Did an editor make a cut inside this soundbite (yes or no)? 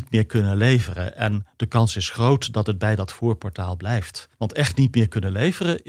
yes